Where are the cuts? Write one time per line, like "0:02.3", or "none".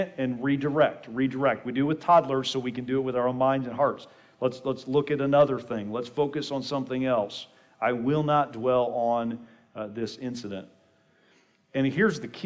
none